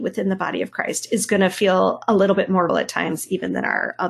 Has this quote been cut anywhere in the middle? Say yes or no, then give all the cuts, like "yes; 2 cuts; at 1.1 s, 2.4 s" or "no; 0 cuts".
yes; 1 cut; at 2.7 s